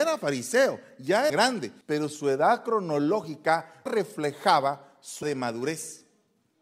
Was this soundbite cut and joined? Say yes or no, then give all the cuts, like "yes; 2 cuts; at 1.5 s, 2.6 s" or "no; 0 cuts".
yes; 4 cuts; at 1.3 s, 1.8 s, 3.9 s, 5.2 s